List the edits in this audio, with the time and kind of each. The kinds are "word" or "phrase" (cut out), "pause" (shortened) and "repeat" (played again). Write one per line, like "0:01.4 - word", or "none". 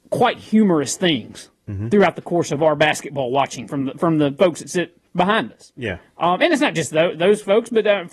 0:05.1 - pause